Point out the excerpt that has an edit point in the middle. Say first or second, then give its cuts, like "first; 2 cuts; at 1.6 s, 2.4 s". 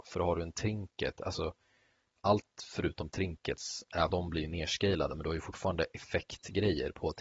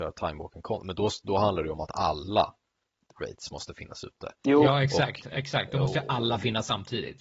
first; 1 cut; at 4.1 s